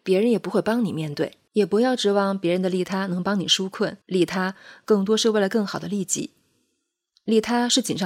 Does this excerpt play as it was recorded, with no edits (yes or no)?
no